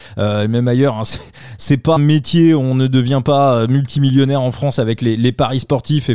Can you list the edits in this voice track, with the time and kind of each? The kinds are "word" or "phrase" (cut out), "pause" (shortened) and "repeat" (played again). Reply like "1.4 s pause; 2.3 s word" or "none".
2.0 s word